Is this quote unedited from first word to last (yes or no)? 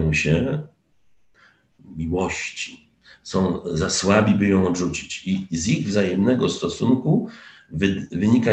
yes